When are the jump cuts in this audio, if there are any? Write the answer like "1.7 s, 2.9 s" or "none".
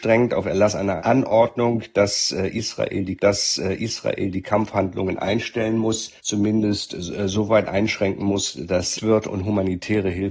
1.0 s, 3.2 s, 6.2 s, 9.0 s